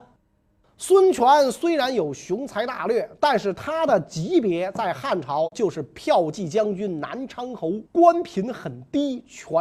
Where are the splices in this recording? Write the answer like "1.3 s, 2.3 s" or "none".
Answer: 7.9 s